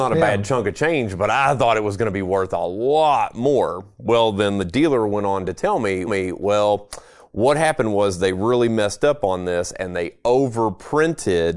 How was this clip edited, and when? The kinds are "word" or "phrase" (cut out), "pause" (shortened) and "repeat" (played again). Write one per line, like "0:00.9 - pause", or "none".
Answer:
0:06.1 - repeat